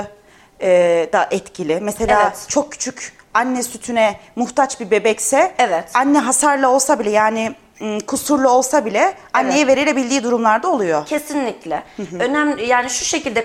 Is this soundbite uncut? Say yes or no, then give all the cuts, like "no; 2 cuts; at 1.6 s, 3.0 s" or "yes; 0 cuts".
yes; 0 cuts